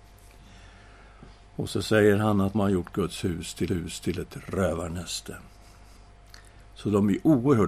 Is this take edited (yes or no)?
yes